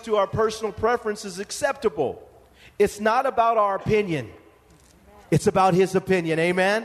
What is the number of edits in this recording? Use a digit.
0